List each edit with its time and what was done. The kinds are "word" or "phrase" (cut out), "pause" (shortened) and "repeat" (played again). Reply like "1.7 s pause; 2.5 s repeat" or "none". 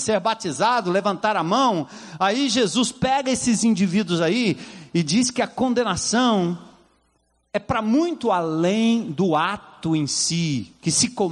none